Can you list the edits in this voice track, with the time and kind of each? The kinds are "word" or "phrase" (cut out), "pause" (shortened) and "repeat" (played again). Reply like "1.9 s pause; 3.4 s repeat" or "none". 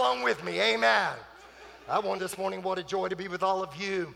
2.2 s phrase